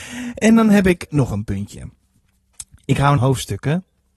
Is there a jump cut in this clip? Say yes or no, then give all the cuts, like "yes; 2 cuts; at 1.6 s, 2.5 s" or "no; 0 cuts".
yes; 2 cuts; at 1.1 s, 3.2 s